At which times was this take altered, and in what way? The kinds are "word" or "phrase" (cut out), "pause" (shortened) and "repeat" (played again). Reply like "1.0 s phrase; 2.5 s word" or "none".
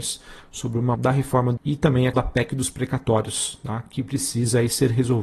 0.9 s word; 1.6 s word; 2.1 s word